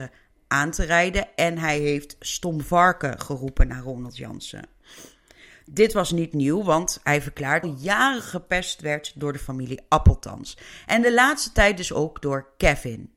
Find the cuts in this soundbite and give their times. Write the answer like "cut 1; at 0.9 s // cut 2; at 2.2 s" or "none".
cut 1; at 7.6 s